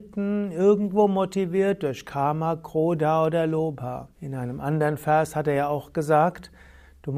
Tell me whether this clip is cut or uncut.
cut